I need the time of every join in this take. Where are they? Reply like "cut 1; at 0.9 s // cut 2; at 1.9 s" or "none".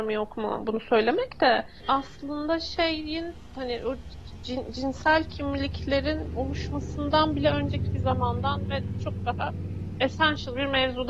none